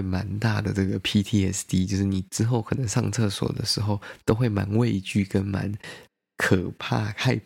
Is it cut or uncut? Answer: uncut